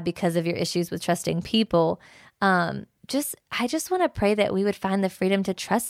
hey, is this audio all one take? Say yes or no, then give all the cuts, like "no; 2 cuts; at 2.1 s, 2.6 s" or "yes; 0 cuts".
no; 1 cut; at 3.0 s